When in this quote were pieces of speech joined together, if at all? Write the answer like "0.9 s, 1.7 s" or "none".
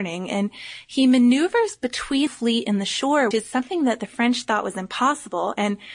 2.3 s, 3.3 s